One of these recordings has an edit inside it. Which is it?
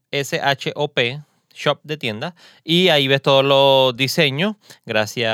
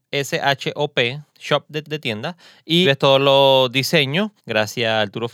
second; 4 cuts; at 1.3 s, 1.8 s, 2.8 s, 4.4 s

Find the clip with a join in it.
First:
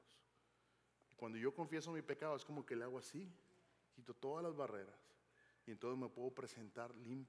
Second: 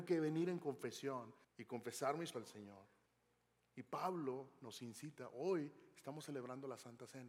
second; 3 cuts; at 1.4 s, 2.3 s, 3.1 s

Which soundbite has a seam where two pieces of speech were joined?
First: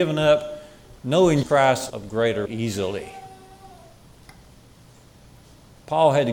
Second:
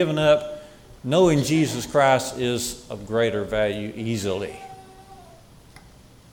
first; 3 cuts; at 1.4 s, 1.9 s, 2.5 s

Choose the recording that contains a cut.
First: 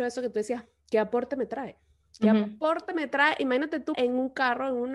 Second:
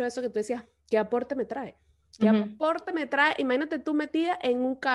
first; 1 cut; at 3.9 s

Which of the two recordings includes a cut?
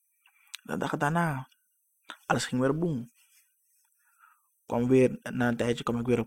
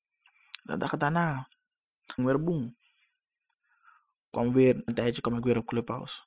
second; 2 cuts; at 2.2 s, 4.9 s

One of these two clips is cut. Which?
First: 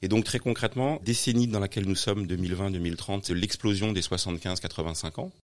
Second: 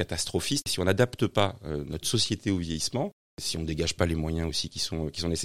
first; 2 cuts; at 1.0 s, 3.3 s

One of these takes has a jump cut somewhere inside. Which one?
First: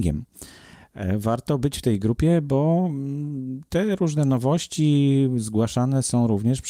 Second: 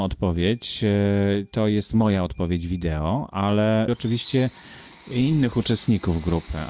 second; 1 cut; at 3.9 s

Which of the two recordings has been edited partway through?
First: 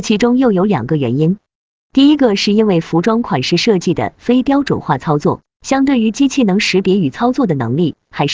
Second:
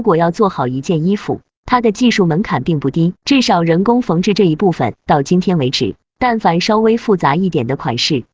second; 1 cut; at 3.2 s

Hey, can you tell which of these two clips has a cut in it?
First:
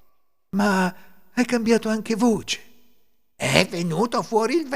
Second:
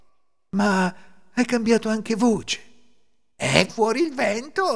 second; 1 cut; at 3.7 s

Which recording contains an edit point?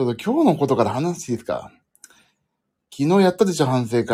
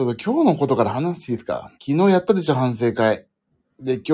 second; 1 cut; at 1.8 s

